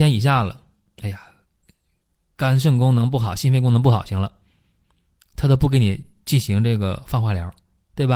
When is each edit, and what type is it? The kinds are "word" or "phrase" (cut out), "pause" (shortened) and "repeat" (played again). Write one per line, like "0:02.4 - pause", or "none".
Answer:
none